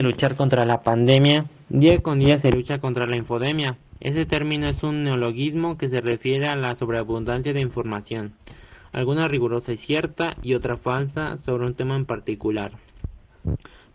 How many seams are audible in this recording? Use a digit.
0